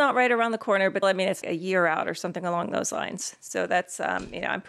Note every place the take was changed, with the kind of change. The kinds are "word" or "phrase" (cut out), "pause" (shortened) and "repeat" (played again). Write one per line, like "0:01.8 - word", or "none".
0:01.0 - word
0:01.4 - phrase